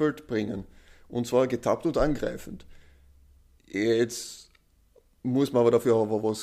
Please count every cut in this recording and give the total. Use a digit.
0